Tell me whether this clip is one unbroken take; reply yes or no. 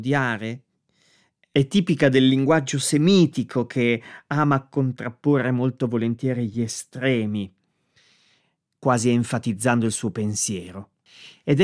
yes